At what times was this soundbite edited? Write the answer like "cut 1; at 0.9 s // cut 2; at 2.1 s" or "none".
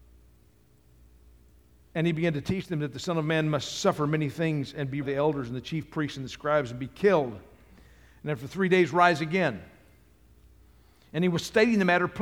cut 1; at 5.0 s